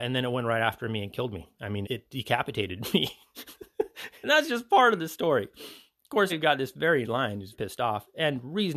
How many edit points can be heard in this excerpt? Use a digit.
5